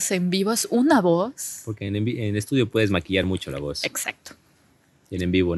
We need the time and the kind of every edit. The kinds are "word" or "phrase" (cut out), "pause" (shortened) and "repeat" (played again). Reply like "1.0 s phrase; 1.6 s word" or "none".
none

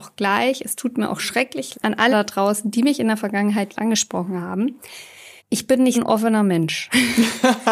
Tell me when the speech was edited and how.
1.7 s word; 2.1 s word; 3.7 s word; 5.4 s pause; 5.9 s word

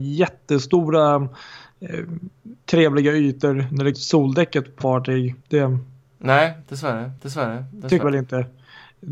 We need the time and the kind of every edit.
2.6 s pause; 3.9 s word; 4.8 s word; 5.4 s pause; 7.2 s repeat; 8.0 s word

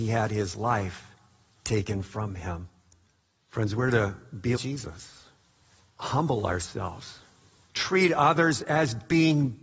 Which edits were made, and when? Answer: 4.6 s word

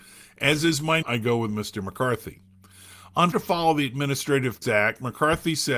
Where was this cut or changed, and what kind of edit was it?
1.0 s word; 3.3 s word; 4.6 s word

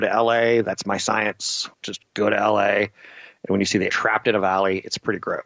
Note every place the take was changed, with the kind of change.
1.7 s pause; 3.9 s word

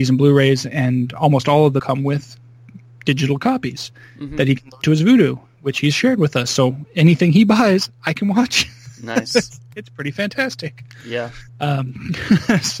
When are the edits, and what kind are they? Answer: 1.8 s word; 4.8 s word; 11.5 s pause

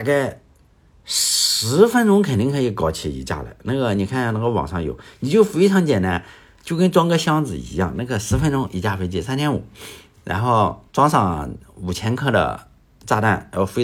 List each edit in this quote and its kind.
10.9 s pause

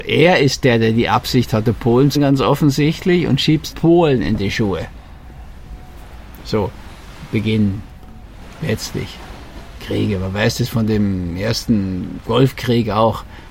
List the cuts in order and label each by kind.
2.1 s word; 3.7 s word

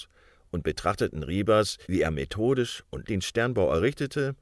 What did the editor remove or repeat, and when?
1.8 s pause; 3.0 s word

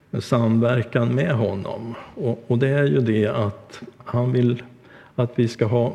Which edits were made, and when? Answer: 4.0 s word

